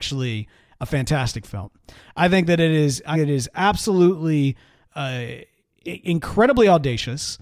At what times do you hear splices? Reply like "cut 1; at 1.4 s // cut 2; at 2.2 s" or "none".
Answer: cut 1; at 3.1 s // cut 2; at 4.9 s